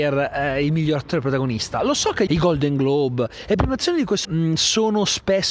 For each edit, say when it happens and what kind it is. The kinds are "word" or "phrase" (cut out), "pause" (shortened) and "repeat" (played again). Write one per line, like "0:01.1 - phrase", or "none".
0:02.3 - phrase
0:04.2 - word

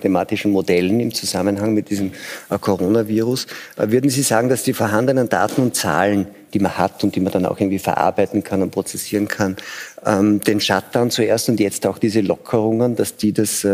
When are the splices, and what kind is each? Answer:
none

